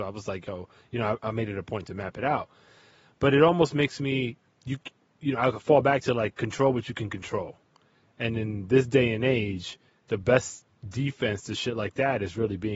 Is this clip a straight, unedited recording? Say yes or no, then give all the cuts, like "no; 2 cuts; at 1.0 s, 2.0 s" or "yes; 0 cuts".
yes; 0 cuts